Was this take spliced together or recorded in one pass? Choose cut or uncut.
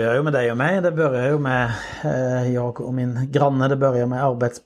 uncut